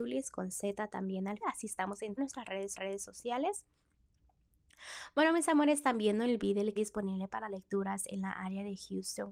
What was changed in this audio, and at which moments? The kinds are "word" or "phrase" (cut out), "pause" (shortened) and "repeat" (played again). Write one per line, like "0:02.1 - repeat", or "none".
0:01.4 - word
0:02.2 - word
0:02.7 - repeat
0:06.8 - word